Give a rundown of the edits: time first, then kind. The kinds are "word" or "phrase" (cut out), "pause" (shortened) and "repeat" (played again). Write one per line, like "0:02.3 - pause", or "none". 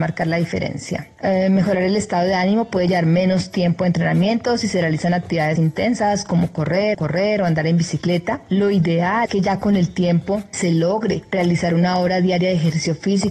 0:05.6 - word
0:06.9 - repeat
0:09.3 - word
0:10.5 - word